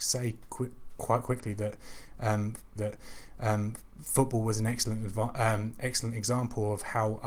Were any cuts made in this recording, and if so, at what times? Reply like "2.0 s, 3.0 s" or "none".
2.8 s